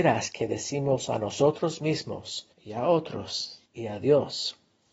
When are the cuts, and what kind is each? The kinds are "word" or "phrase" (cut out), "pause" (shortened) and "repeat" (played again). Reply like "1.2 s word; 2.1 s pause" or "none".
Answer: 2.5 s pause; 3.7 s pause